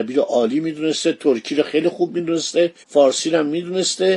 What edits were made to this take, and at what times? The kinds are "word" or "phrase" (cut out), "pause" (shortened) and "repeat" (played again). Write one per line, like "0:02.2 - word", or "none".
0:02.8 - pause